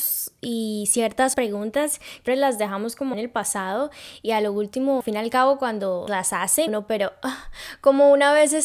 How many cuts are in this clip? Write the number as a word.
six